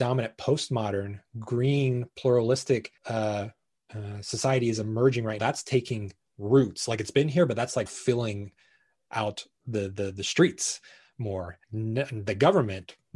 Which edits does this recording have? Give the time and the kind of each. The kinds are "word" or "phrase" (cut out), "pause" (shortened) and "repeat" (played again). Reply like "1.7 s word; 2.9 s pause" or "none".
3.0 s pause; 5.4 s word; 7.9 s word; 11.6 s pause